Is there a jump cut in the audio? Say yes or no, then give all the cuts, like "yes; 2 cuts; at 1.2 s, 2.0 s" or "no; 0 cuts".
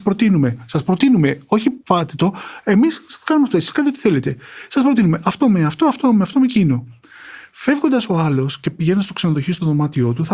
yes; 2 cuts; at 1.8 s, 6.3 s